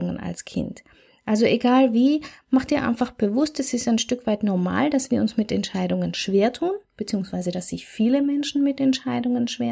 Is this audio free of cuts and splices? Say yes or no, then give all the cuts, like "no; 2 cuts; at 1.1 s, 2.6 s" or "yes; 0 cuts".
yes; 0 cuts